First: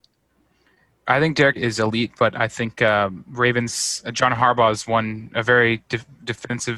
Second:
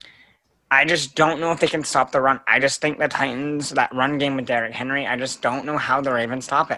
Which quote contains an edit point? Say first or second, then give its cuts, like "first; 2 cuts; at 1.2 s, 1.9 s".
first; 1 cut; at 1.5 s